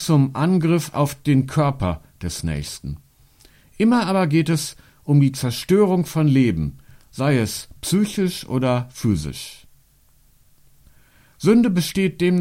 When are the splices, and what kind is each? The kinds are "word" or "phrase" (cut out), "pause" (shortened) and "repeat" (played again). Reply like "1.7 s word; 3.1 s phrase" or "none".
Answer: none